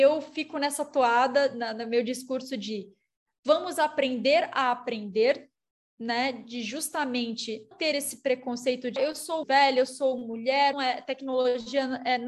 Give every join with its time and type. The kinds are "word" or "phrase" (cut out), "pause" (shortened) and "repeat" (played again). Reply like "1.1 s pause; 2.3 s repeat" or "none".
7.7 s word; 9.0 s word; 9.4 s word; 10.7 s word